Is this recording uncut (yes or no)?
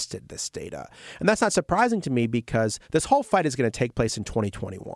no